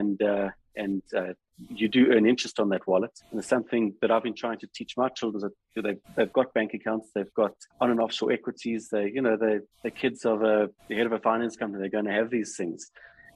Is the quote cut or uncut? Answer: cut